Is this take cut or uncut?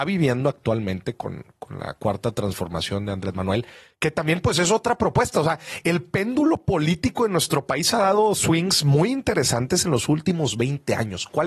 uncut